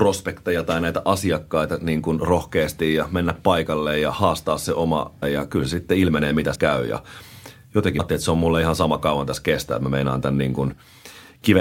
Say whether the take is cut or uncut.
cut